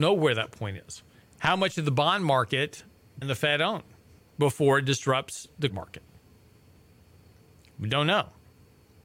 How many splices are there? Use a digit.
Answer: 3